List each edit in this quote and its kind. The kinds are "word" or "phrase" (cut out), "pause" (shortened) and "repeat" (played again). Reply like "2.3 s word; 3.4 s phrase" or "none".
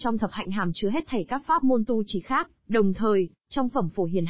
2.6 s pause